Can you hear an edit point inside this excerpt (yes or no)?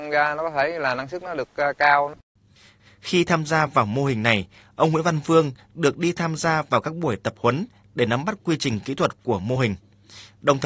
no